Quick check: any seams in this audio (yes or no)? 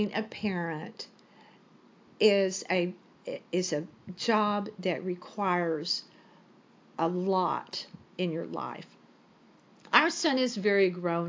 no